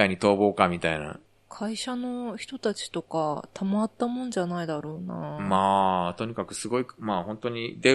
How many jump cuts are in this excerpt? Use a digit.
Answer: 0